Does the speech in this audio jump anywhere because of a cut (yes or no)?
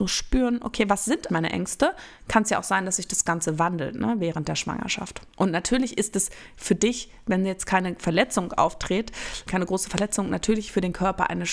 yes